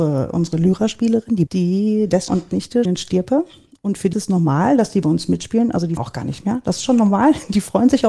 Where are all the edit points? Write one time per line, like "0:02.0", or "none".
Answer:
0:01.5
0:02.3
0:02.8
0:04.1
0:06.0